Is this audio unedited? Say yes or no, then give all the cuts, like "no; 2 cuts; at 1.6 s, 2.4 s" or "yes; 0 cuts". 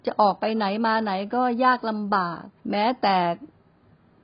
no; 1 cut; at 2.6 s